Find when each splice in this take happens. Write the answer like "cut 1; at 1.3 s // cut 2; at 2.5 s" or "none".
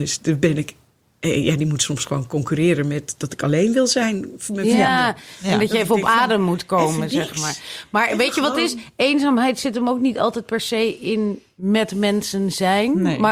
none